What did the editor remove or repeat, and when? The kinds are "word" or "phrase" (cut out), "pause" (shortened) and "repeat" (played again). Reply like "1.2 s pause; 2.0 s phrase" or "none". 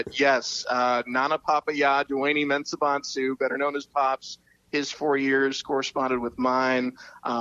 none